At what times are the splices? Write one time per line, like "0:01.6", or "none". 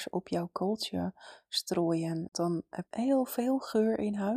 0:02.3
0:02.9

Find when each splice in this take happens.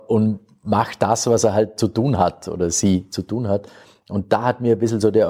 none

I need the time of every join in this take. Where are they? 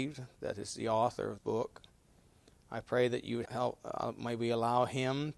0:01.4
0:03.5

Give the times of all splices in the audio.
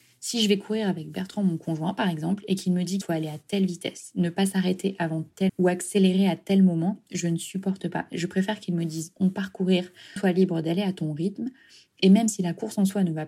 0:03.0
0:05.5
0:10.2

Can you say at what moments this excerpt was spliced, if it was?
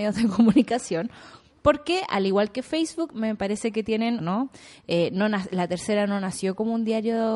0:04.2

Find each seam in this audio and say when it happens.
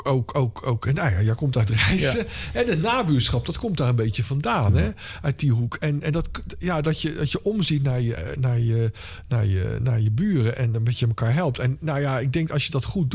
0:10.5

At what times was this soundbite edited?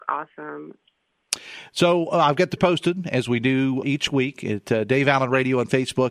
0:02.6
0:03.8

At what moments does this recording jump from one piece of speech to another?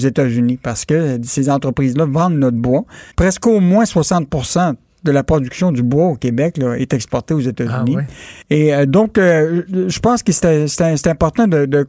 0:03.1
0:08.4

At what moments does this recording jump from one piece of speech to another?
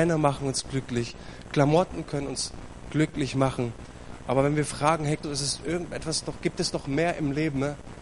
0:05.2

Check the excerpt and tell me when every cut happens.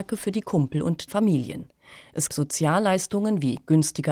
0:01.1
0:02.3

